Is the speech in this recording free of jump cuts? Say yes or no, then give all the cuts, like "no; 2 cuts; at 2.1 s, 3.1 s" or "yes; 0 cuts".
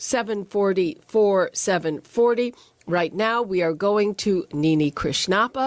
yes; 0 cuts